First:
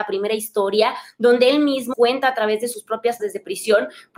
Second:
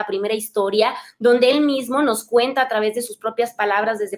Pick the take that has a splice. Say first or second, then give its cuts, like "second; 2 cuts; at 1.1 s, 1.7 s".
first; 2 cuts; at 1.9 s, 3.2 s